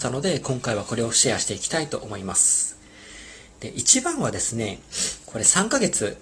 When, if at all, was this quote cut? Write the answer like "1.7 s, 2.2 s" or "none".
none

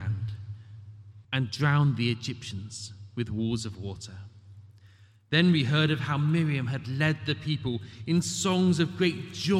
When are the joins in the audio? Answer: 1.2 s

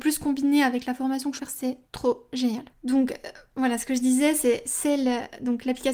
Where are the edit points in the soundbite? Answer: 1.4 s, 1.9 s, 2.7 s

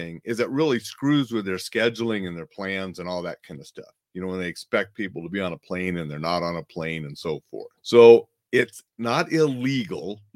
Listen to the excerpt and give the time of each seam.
7.8 s, 8.9 s

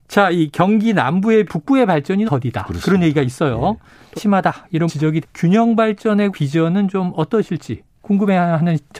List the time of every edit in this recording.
1.5 s, 2.3 s, 4.2 s, 4.9 s, 5.2 s, 6.3 s

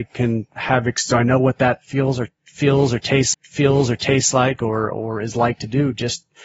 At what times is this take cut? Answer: 3.3 s

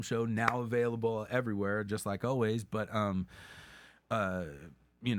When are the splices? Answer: none

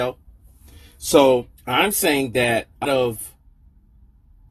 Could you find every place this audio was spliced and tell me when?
1.6 s, 2.8 s

